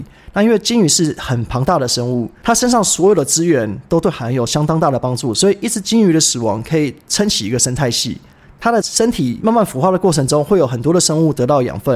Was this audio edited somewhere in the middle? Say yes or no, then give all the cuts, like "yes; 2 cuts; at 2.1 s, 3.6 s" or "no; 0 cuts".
no; 0 cuts